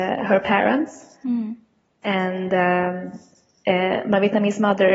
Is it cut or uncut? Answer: uncut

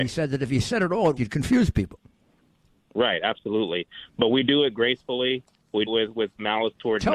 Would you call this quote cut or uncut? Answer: cut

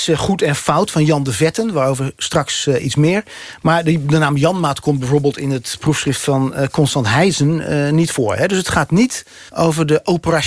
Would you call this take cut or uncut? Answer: cut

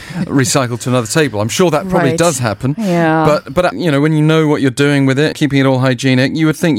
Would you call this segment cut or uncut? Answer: cut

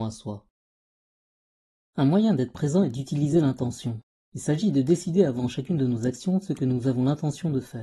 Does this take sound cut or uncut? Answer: uncut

